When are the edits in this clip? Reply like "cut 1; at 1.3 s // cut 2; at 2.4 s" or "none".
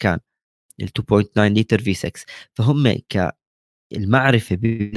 none